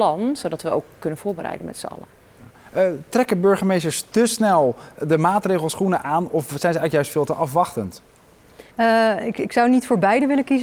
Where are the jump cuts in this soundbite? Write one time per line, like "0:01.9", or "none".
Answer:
0:08.7